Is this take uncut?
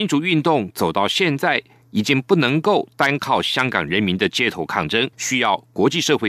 no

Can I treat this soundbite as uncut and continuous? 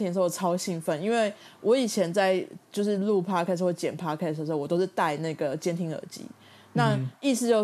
yes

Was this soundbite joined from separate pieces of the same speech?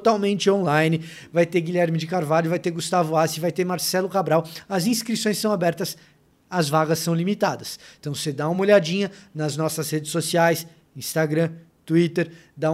no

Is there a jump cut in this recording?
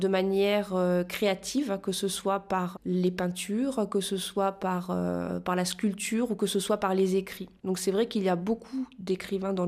yes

